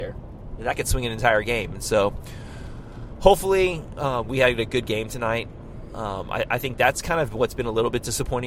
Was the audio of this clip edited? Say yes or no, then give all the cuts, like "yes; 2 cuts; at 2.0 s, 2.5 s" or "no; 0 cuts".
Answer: no; 0 cuts